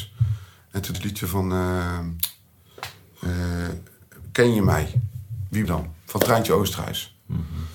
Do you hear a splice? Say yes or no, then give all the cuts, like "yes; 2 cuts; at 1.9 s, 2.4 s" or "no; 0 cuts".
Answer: yes; 2 cuts; at 0.9 s, 5.6 s